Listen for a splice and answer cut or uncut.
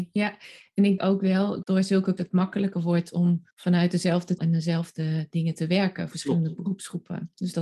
cut